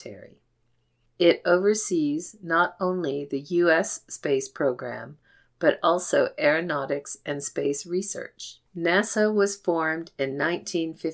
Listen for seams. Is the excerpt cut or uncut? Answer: cut